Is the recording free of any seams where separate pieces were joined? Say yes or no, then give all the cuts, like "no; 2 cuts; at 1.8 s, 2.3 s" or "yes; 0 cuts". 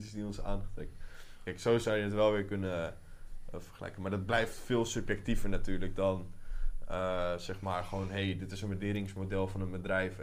yes; 0 cuts